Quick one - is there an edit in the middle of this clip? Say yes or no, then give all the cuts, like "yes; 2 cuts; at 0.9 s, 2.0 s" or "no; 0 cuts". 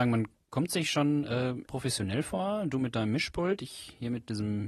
yes; 1 cut; at 1.7 s